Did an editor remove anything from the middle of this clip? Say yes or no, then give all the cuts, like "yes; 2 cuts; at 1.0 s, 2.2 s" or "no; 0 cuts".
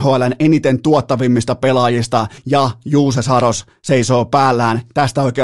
yes; 1 cut; at 2.4 s